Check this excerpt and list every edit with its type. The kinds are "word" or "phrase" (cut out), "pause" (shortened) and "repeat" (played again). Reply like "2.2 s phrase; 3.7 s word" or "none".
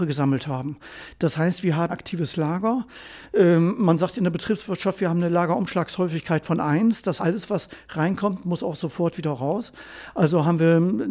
1.9 s phrase; 7.2 s word